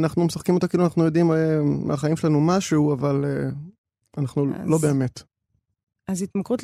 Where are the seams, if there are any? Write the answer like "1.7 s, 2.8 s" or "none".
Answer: none